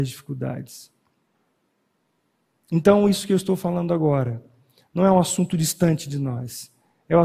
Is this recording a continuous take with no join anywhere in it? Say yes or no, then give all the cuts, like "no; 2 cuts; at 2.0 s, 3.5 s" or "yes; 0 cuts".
yes; 0 cuts